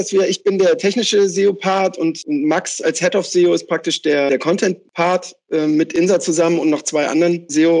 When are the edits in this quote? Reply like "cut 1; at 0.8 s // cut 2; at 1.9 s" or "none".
none